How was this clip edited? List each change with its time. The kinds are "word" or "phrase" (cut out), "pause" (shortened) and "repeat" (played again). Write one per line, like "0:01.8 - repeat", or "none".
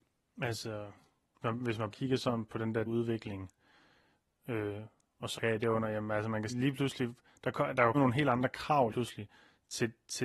0:01.4 - word
0:01.9 - word
0:02.8 - word
0:05.3 - word
0:06.5 - word
0:07.9 - word
0:08.9 - word